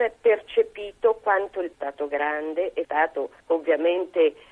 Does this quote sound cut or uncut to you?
cut